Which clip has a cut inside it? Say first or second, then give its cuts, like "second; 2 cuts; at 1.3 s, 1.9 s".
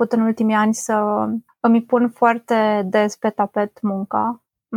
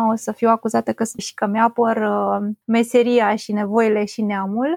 second; 2 cuts; at 1.2 s, 2.6 s